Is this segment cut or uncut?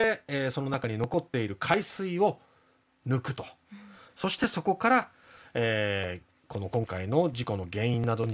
uncut